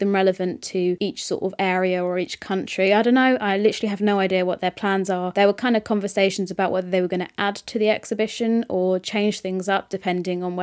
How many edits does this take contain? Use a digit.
0